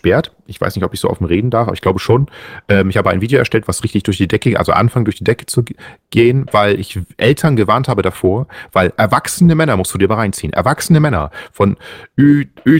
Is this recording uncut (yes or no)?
yes